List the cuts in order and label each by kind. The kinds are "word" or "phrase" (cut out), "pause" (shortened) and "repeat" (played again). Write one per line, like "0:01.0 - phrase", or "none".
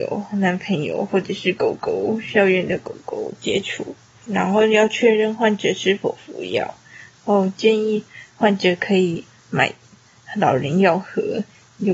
none